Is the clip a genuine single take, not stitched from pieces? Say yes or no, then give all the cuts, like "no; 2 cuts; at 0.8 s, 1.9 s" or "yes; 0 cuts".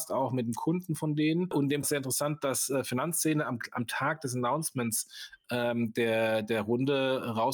no; 1 cut; at 1.8 s